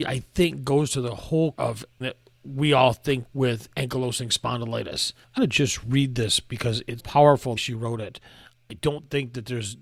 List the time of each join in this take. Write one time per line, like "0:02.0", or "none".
0:01.5
0:02.0
0:03.2
0:05.4
0:07.0
0:07.6